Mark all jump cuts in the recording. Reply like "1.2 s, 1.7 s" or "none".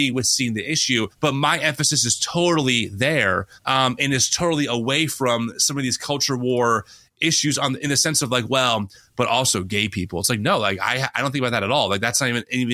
1.1 s, 3.6 s